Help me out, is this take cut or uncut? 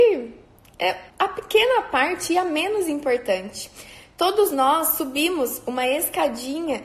cut